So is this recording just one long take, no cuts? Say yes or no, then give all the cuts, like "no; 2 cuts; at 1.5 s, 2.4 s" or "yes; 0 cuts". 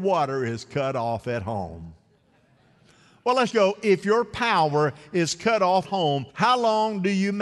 no; 3 cuts; at 3.5 s, 5.8 s, 6.3 s